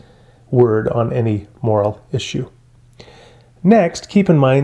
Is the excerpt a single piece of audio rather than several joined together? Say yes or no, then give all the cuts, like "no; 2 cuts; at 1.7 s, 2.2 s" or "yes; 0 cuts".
yes; 0 cuts